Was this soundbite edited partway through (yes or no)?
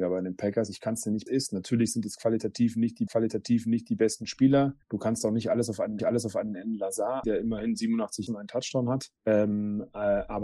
yes